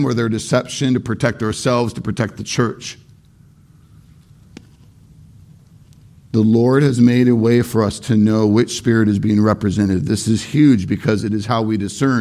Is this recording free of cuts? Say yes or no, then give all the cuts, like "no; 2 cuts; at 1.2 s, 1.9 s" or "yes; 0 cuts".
yes; 0 cuts